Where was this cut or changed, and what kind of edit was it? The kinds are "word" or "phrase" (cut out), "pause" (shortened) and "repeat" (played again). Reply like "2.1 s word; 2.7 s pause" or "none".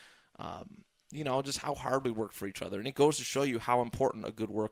none